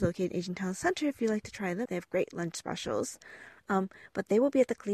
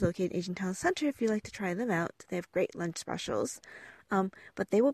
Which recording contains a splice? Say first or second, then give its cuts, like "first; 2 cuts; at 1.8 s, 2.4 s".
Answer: first; 1 cut; at 1.9 s